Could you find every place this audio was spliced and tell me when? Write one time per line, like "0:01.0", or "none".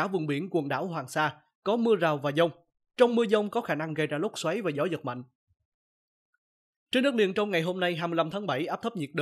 none